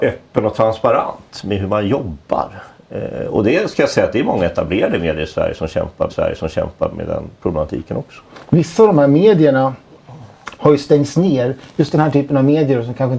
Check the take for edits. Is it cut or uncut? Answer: cut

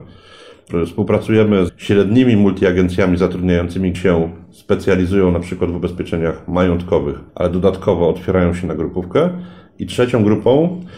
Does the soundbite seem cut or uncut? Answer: cut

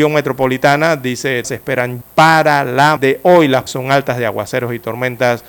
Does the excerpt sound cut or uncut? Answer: cut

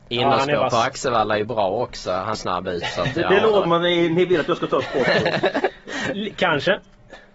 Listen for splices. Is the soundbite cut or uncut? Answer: cut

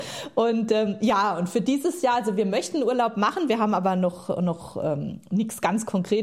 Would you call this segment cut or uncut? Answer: uncut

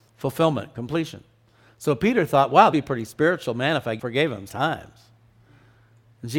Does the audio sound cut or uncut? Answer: cut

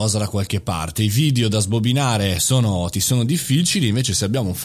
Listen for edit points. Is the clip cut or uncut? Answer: cut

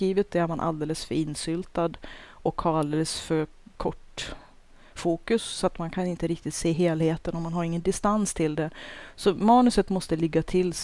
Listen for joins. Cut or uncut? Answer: uncut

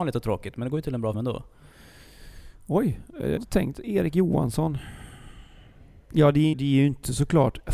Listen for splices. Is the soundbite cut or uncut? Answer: cut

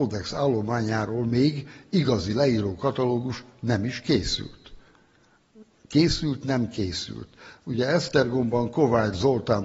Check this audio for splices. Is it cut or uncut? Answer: uncut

